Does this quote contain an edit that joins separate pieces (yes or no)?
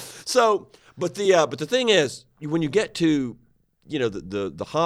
no